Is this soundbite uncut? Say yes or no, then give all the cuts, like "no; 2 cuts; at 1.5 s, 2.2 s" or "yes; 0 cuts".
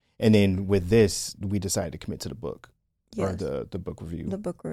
yes; 0 cuts